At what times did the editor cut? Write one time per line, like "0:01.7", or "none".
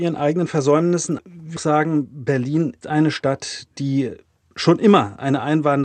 0:01.2
0:01.6
0:02.8

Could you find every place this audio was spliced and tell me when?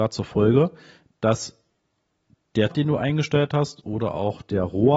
0:02.7

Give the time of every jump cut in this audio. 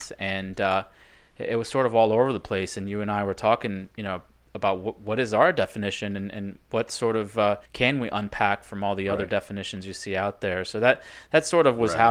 0:07.7

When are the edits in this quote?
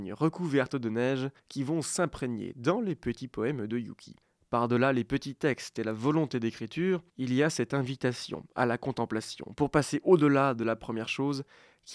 0:01.4
0:04.2
0:07.1

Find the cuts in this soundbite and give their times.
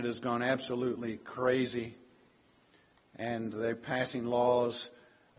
none

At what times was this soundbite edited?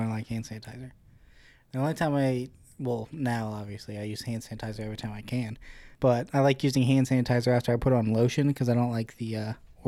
0:05.9

